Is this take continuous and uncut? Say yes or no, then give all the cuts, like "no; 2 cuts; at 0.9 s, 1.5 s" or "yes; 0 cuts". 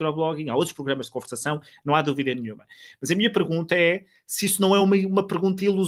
yes; 0 cuts